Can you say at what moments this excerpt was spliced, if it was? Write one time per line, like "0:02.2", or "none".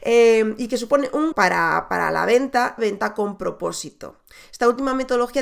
0:01.3
0:02.8